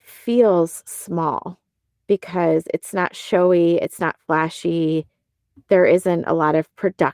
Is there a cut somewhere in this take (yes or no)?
no